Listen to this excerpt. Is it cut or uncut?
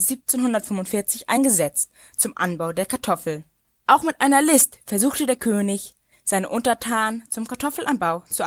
uncut